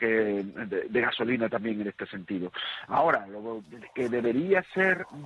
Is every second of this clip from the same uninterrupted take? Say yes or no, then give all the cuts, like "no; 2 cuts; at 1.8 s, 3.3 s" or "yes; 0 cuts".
yes; 0 cuts